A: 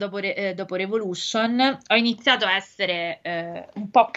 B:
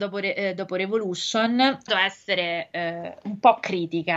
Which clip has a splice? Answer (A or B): B